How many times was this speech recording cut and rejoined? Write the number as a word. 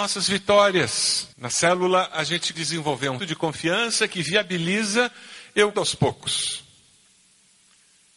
four